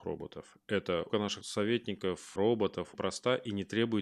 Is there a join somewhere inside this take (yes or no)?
yes